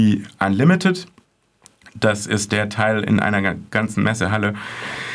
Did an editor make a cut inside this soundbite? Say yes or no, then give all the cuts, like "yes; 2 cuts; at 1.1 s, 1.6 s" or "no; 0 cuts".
no; 0 cuts